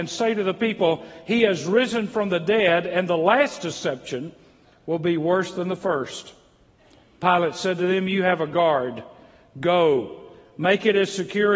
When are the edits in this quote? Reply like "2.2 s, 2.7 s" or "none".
none